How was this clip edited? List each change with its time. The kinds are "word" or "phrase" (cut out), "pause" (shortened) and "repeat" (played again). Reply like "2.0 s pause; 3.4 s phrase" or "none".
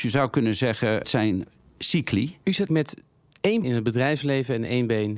1.0 s word; 2.7 s word; 3.6 s word